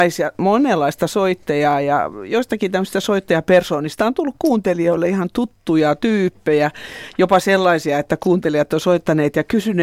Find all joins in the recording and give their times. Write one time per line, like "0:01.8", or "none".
none